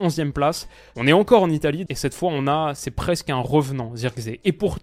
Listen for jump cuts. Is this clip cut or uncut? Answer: cut